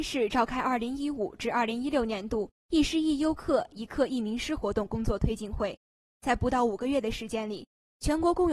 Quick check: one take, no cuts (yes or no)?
yes